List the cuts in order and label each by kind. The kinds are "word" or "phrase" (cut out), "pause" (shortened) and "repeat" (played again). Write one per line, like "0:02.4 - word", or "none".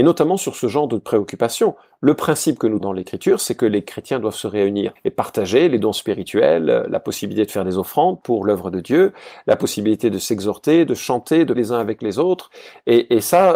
0:02.8 - word
0:05.0 - word
0:11.6 - word